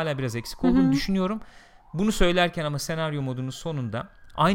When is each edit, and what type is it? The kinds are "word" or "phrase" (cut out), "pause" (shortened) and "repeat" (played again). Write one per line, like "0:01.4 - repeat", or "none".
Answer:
none